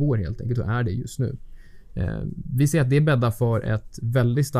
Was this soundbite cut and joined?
no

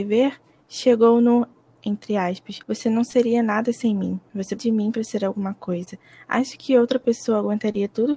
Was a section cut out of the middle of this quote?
yes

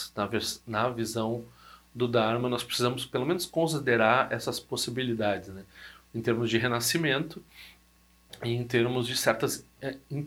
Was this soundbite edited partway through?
no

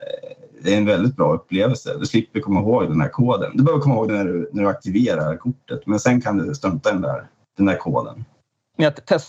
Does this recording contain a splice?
yes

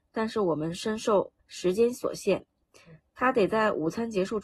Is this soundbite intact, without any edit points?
no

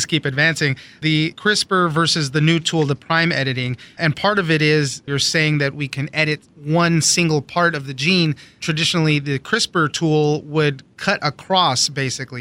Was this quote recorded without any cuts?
yes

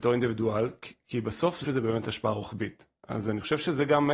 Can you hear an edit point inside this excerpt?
yes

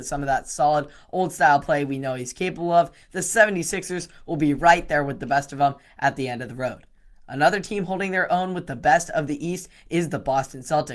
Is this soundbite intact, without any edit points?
yes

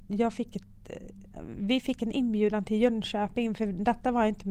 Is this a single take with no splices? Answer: yes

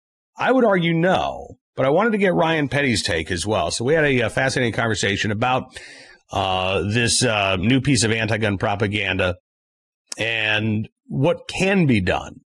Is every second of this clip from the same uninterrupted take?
no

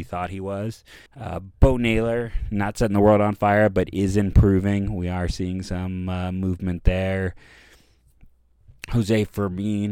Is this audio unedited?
no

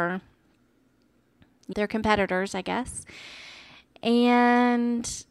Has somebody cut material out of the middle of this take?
yes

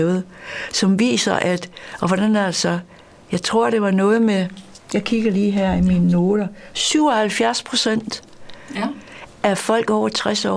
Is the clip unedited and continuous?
yes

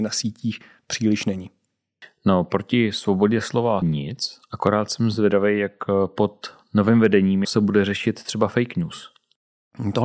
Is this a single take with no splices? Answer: no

